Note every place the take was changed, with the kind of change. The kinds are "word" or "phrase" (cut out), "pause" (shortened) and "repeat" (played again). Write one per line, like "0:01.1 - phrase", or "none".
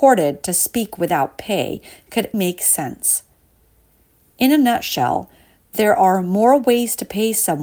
0:02.3 - word